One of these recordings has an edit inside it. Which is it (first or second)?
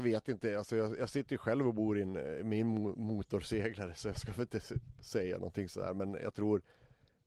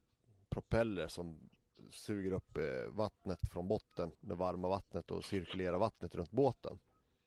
second